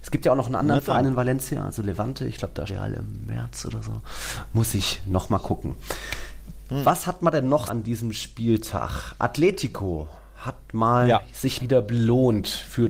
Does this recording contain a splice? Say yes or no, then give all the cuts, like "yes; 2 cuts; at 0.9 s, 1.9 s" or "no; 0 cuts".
yes; 3 cuts; at 2.7 s, 7.7 s, 11.6 s